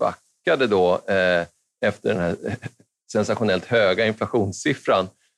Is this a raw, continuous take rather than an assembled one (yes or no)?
yes